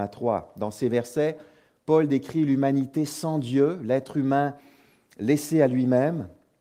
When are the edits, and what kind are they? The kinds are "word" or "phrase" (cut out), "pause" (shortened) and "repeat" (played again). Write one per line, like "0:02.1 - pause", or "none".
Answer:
none